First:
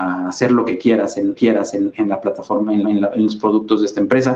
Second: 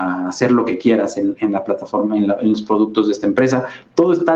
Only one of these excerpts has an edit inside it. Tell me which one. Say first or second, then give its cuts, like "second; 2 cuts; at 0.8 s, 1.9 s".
first; 2 cuts; at 1.4 s, 2.8 s